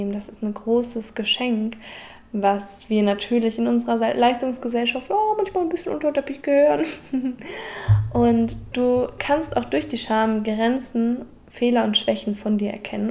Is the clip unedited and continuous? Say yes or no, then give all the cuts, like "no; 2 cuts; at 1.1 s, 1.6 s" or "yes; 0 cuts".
yes; 0 cuts